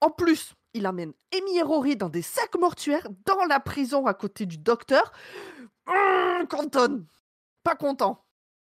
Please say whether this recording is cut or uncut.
uncut